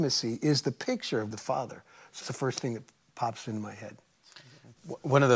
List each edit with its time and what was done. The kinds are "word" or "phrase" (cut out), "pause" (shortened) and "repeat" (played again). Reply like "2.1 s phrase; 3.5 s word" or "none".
1.3 s word; 2.2 s word

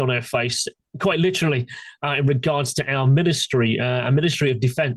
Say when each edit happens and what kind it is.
none

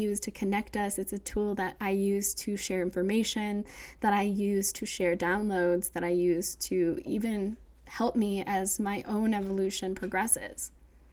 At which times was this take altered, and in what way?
none

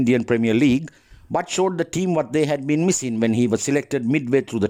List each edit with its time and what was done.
none

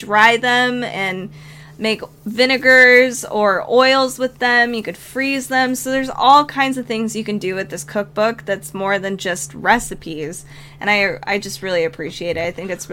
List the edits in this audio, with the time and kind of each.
none

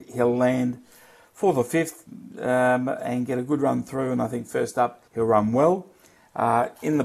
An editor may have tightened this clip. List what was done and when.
5.1 s pause

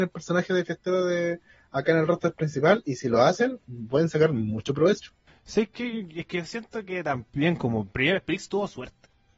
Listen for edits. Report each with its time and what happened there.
none

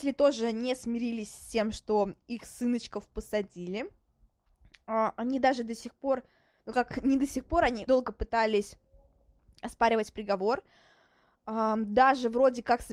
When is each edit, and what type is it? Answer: 7.9 s word

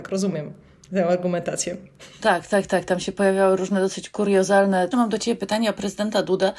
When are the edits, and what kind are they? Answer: 4.9 s phrase

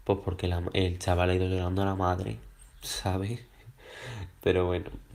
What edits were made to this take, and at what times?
none

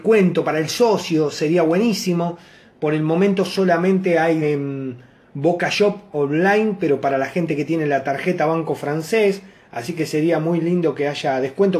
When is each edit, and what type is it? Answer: 4.4 s word

